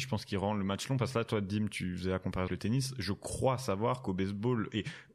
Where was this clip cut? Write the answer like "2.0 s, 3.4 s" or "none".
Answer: 2.5 s